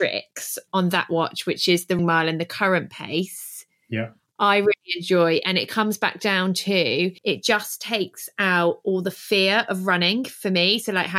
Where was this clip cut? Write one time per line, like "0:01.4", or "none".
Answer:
0:02.0
0:07.2